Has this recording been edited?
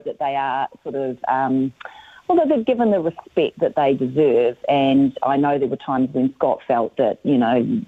no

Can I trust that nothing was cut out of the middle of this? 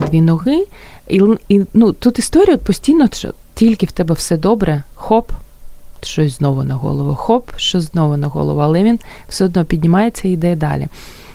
yes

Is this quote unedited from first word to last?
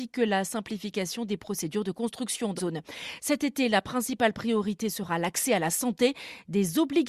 no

